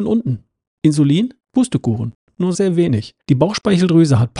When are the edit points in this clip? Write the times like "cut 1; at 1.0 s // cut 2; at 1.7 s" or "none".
cut 1; at 1.4 s // cut 2; at 2.5 s // cut 3; at 3.2 s